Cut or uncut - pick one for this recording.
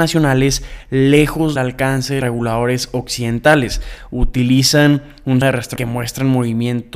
cut